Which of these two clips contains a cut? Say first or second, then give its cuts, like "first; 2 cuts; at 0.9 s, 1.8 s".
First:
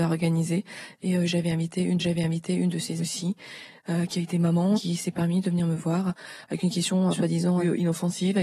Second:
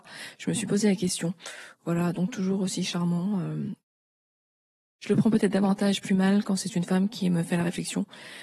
first; 4 cuts; at 2.0 s, 3.0 s, 4.7 s, 7.1 s